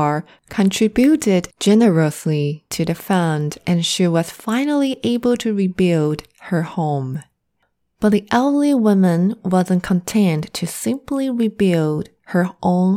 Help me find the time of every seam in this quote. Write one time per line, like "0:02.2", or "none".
none